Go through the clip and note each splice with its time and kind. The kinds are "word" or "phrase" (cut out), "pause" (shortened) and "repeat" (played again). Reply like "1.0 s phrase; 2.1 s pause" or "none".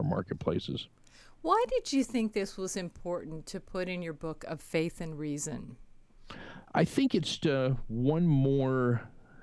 7.4 s word